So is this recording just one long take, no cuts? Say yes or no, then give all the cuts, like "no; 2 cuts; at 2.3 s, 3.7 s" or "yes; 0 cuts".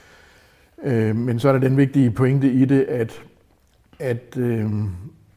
yes; 0 cuts